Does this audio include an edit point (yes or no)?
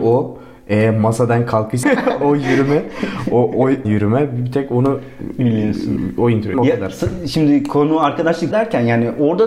yes